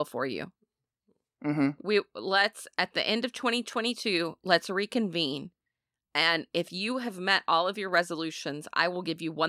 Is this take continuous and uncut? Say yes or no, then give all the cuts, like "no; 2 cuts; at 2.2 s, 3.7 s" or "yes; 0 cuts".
yes; 0 cuts